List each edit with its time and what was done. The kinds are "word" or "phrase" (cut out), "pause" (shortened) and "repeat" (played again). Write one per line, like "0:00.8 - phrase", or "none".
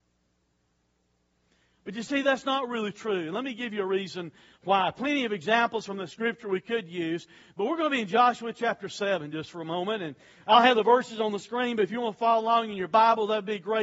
none